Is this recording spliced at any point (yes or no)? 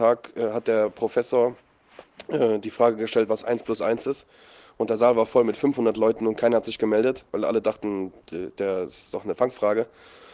no